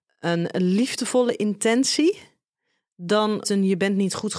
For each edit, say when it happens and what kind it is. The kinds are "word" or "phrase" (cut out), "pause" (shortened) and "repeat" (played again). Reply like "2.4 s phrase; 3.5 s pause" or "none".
3.4 s word